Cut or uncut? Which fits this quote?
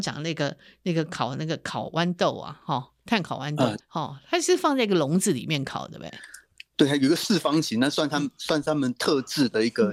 cut